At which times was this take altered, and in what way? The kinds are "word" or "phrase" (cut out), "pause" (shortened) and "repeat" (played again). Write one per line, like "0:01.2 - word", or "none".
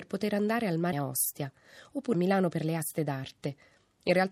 0:00.9 - word
0:02.1 - phrase